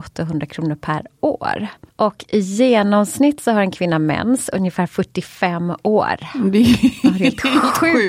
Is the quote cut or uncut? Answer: uncut